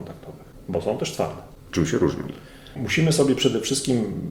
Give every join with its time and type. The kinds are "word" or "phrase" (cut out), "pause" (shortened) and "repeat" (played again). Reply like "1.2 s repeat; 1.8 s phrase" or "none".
none